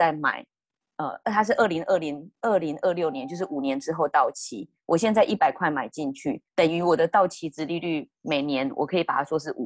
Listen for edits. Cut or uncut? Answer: cut